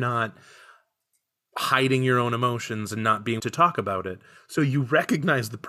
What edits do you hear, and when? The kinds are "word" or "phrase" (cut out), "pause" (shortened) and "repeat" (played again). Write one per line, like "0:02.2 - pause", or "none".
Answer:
0:03.4 - word